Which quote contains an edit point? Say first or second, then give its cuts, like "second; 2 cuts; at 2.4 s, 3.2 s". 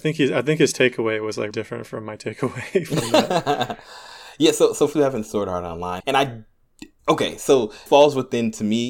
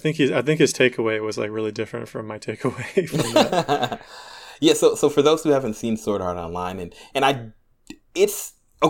first; 6 cuts; at 1.5 s, 4.9 s, 5.2 s, 6.0 s, 7.0 s, 7.9 s